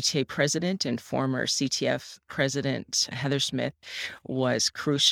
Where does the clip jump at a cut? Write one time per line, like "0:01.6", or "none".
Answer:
none